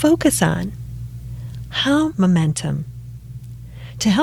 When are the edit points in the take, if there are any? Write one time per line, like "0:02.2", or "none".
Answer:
0:02.1